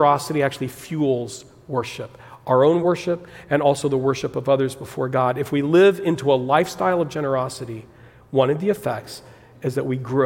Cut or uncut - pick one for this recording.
uncut